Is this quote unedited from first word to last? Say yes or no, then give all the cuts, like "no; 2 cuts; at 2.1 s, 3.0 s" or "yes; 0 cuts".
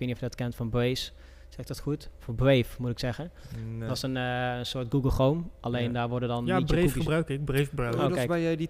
yes; 0 cuts